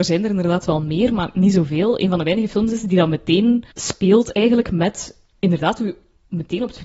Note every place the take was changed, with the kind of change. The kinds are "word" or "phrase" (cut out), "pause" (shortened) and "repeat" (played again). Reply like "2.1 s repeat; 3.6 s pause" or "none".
3.7 s pause